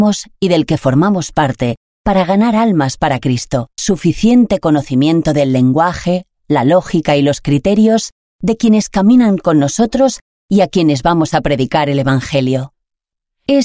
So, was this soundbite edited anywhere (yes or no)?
yes